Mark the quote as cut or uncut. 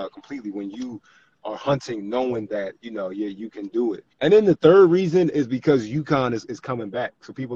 cut